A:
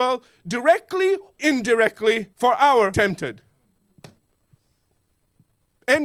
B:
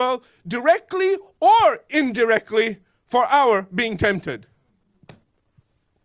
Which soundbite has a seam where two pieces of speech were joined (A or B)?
A